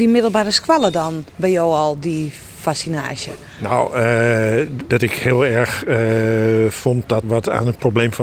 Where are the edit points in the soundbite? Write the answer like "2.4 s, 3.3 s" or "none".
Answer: 1.3 s, 4.9 s, 7.2 s